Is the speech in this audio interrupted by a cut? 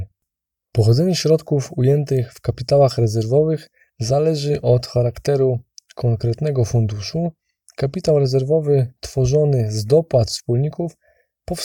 no; 0 cuts

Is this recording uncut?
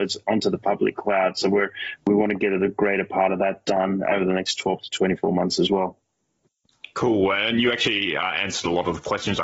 yes; 0 cuts

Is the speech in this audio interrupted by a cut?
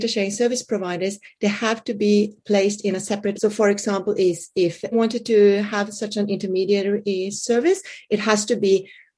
yes; 2 cuts; at 3.4 s, 4.9 s

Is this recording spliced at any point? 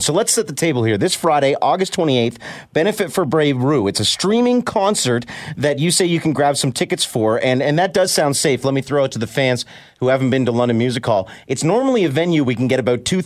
no; 0 cuts

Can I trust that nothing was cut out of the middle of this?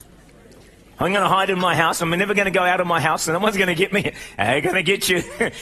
yes; 0 cuts

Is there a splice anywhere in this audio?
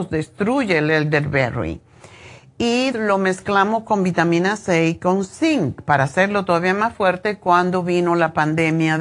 yes; 1 cut; at 2.9 s

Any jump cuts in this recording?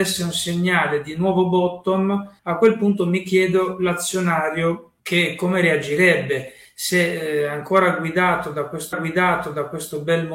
yes; 3 cuts; at 2.4 s, 5.0 s, 8.9 s

